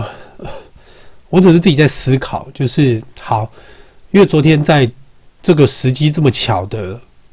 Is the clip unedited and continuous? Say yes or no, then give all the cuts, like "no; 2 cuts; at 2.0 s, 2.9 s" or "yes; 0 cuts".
yes; 0 cuts